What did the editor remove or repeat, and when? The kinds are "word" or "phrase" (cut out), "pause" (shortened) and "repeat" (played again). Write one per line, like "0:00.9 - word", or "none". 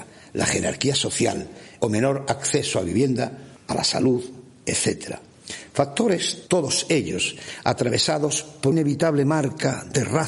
0:01.8 - phrase
0:03.6 - pause
0:08.7 - word